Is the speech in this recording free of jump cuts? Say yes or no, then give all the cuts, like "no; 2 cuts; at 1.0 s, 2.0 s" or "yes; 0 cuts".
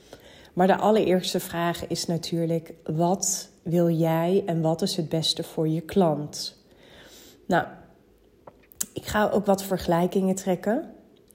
yes; 0 cuts